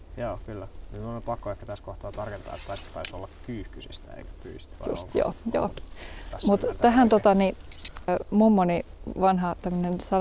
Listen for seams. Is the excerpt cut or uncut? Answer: cut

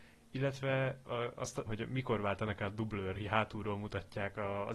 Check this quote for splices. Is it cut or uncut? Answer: cut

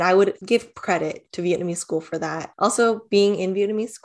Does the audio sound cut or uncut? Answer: uncut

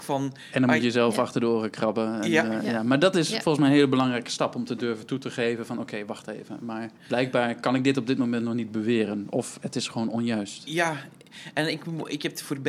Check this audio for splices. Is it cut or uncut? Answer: cut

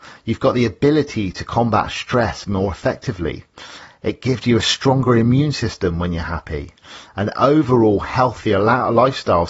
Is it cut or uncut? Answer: uncut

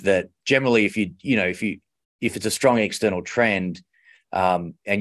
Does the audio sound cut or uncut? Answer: uncut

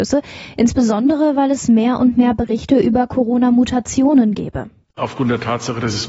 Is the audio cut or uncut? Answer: uncut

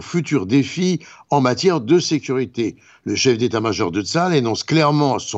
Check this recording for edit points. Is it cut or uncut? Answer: uncut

